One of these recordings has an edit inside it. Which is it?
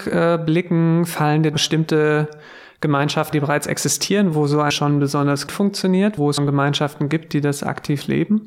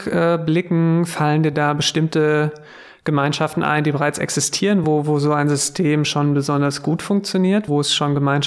first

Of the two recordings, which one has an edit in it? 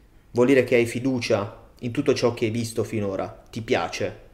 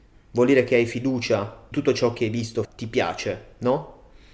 second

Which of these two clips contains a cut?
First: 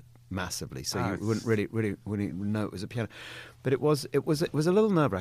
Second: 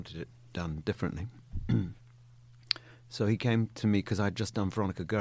second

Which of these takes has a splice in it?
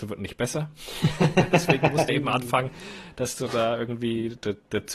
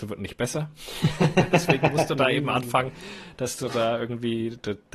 first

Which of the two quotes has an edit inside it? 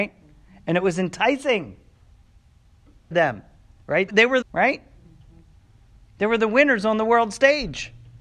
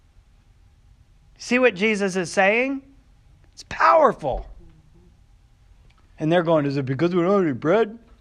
first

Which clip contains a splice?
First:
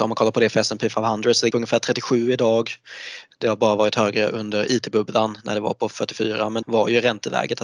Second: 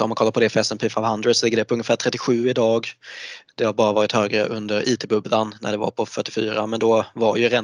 first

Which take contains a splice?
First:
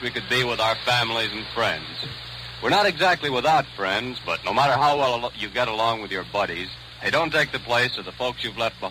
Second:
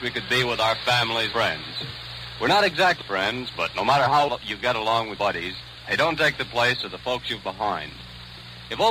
second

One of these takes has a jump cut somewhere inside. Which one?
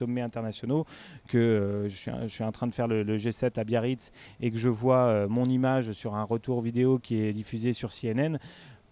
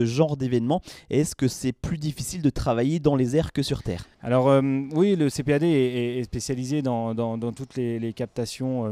second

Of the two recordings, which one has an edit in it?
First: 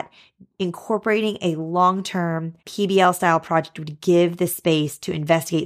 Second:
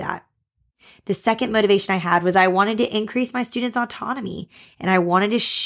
first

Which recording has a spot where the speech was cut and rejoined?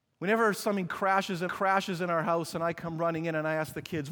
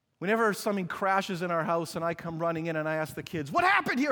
first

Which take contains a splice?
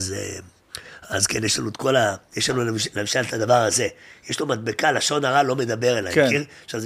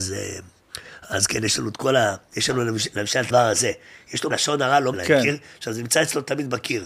second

